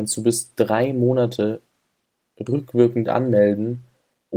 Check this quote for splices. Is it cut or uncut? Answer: uncut